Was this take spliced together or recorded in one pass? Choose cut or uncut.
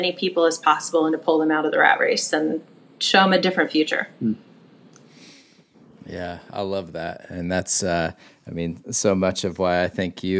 uncut